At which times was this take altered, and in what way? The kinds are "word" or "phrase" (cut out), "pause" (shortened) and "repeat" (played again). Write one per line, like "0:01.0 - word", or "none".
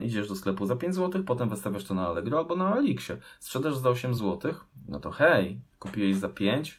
none

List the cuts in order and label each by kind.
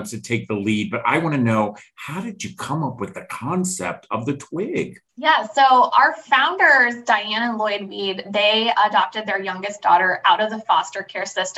0:05.1 - pause

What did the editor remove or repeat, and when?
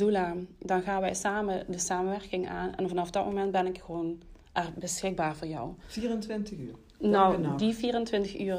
0:04.4 - pause

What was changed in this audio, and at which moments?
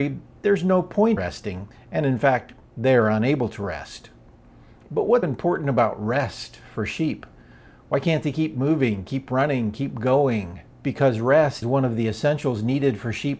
0:01.2 - word
0:05.2 - word
0:10.7 - pause
0:11.6 - word

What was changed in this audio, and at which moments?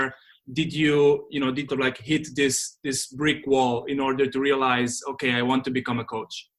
0:01.7 - phrase

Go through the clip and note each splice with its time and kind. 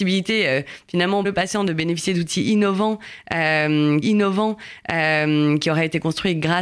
0:01.2 - word
0:04.0 - repeat

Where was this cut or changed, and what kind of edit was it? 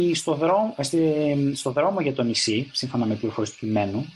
none

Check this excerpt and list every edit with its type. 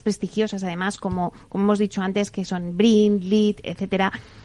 none

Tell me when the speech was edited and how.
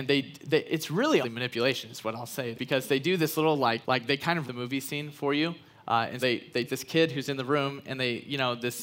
0:01.2 - word
0:02.5 - word
0:03.8 - word
0:04.5 - word
0:06.2 - word
0:06.7 - word

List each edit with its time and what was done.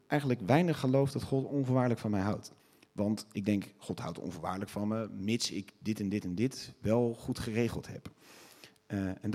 0:02.6 - pause

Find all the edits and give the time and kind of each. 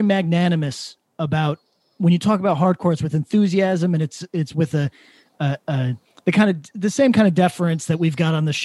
none

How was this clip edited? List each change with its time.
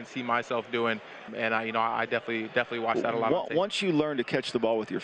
0:01.3 - word

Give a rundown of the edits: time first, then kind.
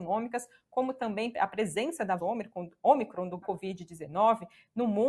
0:01.3 - word
0:02.2 - word
0:03.4 - word

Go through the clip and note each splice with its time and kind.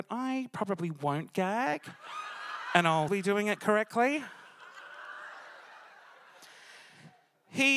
0:03.1 - word

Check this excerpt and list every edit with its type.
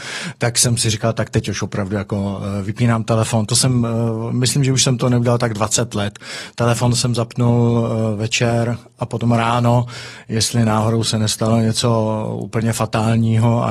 none

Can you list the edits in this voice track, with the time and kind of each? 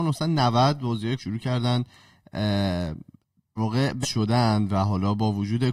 0:01.2 - word
0:03.6 - word
0:04.0 - word

